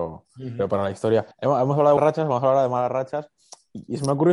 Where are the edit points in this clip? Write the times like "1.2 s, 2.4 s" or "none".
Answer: 1.3 s, 2.0 s